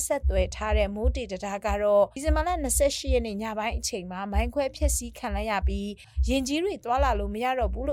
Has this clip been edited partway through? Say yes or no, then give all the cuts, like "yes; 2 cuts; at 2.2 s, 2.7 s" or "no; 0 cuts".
no; 0 cuts